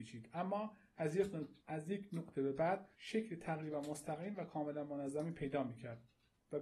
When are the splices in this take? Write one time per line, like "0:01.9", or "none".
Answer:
0:01.6
0:02.9